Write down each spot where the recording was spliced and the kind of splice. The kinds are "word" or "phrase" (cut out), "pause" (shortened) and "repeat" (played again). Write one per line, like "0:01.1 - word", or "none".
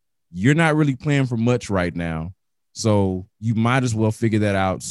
none